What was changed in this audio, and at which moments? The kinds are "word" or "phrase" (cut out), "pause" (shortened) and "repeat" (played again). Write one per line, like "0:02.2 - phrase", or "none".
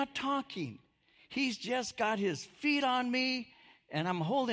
none